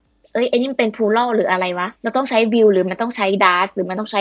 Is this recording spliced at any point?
yes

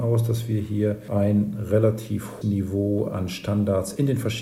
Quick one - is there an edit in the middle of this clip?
yes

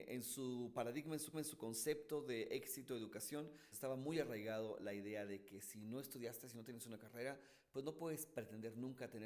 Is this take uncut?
no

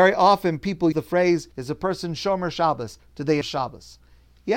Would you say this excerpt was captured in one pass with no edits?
no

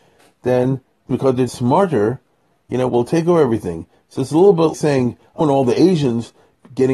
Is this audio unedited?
no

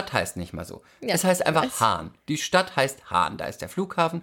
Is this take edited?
yes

